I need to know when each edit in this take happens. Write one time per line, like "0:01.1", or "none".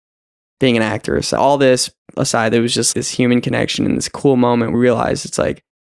0:01.4
0:02.9
0:04.7